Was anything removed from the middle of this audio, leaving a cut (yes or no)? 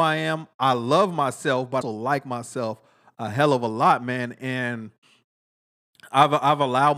yes